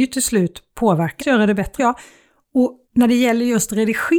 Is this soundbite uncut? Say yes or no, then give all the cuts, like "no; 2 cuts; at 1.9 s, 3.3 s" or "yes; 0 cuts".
no; 3 cuts; at 1.2 s, 1.8 s, 2.8 s